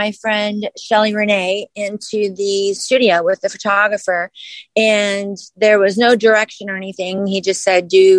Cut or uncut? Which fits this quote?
uncut